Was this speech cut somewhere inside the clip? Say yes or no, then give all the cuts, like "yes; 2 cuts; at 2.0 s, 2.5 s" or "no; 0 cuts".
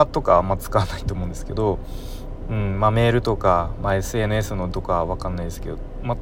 yes; 1 cut; at 4.7 s